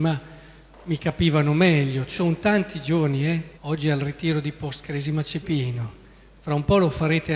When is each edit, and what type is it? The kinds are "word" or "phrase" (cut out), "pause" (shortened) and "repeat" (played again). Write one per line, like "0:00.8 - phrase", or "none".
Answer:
0:03.5 - pause
0:05.4 - word